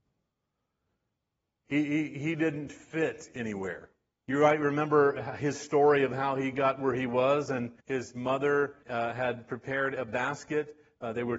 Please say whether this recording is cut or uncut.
cut